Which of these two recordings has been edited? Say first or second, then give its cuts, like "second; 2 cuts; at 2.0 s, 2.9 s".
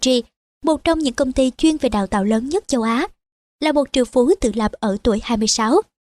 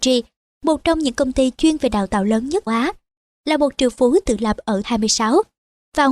second; 2 cuts; at 2.7 s, 4.8 s